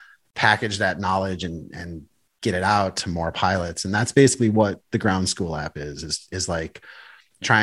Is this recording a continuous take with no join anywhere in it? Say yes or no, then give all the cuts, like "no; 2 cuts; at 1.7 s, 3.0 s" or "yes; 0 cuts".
yes; 0 cuts